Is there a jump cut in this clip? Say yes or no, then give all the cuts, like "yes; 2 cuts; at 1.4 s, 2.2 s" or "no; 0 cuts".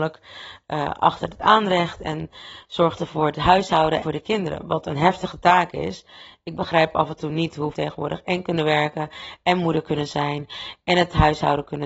yes; 2 cuts; at 4.0 s, 7.7 s